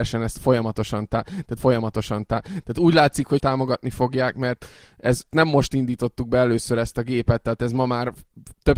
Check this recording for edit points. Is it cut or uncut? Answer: cut